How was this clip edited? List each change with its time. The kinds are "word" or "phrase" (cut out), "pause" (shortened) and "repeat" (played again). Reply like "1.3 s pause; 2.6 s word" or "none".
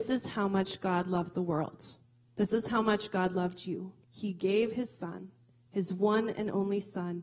2.0 s pause; 4.0 s pause